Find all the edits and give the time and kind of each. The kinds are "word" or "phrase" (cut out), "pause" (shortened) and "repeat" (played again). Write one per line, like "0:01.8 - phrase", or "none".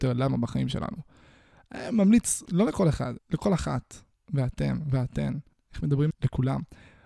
0:02.5 - word
0:03.2 - word
0:04.2 - word
0:05.5 - word
0:06.1 - word